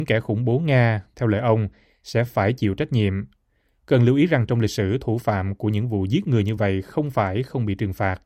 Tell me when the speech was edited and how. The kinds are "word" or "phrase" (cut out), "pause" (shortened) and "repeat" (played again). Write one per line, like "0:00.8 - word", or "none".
none